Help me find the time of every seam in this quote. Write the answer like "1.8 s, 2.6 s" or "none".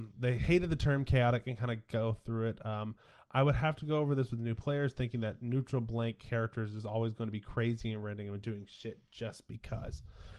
none